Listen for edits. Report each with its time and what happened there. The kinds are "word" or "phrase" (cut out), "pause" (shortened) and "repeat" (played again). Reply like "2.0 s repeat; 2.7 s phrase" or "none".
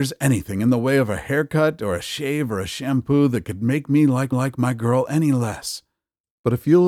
4.3 s repeat